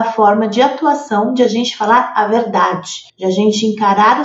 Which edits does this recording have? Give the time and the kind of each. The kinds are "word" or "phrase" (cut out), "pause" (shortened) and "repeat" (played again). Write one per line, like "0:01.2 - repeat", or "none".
0:03.1 - pause